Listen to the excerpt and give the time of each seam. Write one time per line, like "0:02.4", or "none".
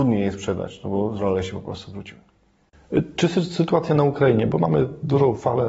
none